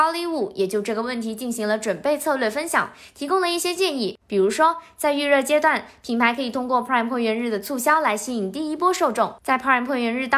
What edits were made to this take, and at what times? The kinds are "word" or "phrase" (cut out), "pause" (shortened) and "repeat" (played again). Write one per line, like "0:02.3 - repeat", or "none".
none